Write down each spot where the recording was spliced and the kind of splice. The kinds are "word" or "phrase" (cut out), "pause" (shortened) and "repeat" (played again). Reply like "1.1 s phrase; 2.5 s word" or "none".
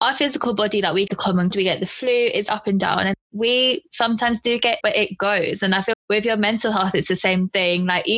1.1 s word; 1.5 s word; 2.5 s word; 4.8 s word; 5.9 s word

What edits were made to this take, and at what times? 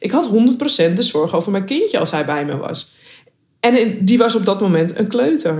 none

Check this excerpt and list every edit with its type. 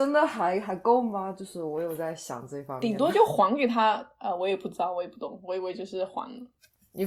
none

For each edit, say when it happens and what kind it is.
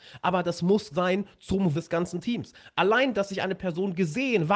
0.9 s word; 1.7 s word; 3.1 s word

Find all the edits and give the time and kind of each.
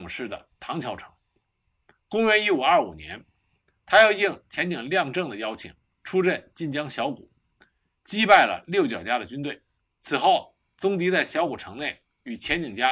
9.8 s pause

